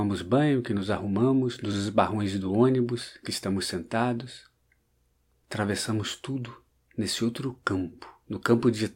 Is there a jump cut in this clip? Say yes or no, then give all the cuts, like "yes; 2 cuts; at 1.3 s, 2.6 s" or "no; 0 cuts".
no; 0 cuts